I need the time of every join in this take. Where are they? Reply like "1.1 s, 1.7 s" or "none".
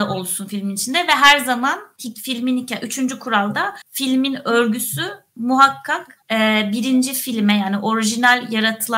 3.8 s, 6.2 s